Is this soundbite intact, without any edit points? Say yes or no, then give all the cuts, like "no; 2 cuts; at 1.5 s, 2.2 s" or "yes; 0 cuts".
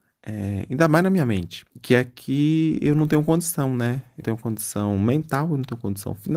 no; 2 cuts; at 1.7 s, 4.2 s